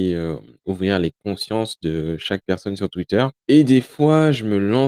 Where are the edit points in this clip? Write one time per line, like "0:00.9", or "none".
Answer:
0:03.4